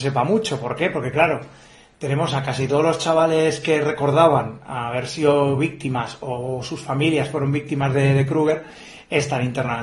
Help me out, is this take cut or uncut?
uncut